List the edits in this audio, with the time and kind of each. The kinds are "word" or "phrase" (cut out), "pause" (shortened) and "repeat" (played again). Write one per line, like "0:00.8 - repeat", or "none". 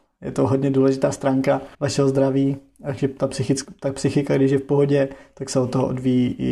0:01.7 - pause